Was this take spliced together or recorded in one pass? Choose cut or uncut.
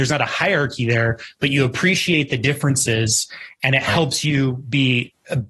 uncut